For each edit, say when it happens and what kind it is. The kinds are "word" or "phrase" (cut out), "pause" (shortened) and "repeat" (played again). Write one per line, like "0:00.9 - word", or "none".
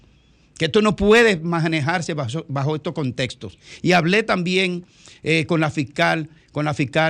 none